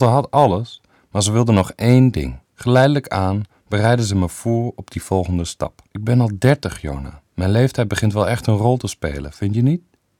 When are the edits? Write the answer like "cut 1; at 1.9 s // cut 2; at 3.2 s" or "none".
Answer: cut 1; at 2.4 s // cut 2; at 5.9 s